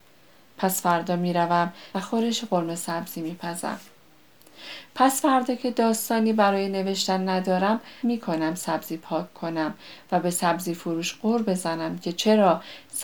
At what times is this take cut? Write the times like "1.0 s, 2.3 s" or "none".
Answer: 1.9 s, 8.0 s